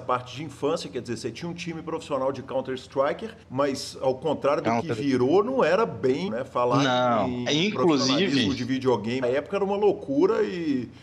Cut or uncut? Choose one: cut